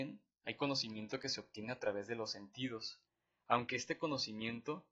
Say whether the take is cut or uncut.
uncut